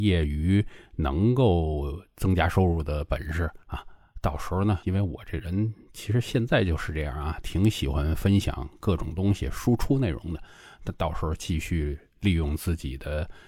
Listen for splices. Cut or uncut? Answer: cut